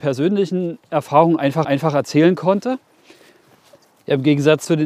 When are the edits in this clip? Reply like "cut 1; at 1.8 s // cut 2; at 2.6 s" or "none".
cut 1; at 1.6 s